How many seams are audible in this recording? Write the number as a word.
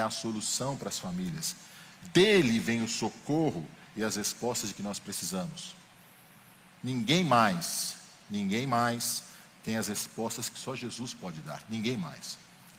zero